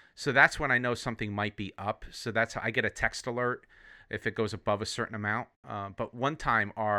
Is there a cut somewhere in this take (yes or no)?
no